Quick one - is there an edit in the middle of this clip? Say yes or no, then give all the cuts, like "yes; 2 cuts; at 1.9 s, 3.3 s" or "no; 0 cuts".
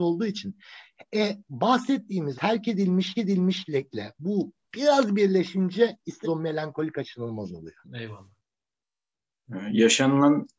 yes; 5 cuts; at 2.3 s, 3.1 s, 4.6 s, 6.2 s, 7.8 s